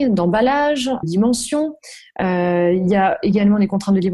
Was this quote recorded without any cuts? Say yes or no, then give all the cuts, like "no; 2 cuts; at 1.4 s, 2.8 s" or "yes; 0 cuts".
no; 1 cut; at 1.0 s